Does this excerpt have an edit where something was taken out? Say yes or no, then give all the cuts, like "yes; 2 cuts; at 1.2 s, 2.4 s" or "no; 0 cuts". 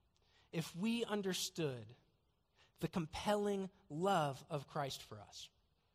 no; 0 cuts